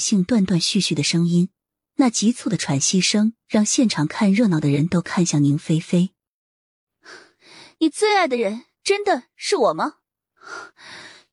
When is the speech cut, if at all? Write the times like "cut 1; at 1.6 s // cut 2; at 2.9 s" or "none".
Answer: none